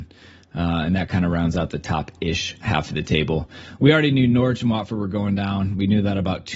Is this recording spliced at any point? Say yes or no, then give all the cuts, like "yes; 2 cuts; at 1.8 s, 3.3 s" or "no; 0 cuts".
no; 0 cuts